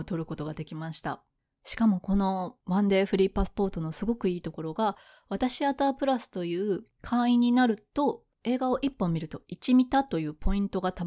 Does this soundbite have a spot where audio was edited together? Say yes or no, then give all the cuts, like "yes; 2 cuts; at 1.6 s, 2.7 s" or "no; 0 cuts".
no; 0 cuts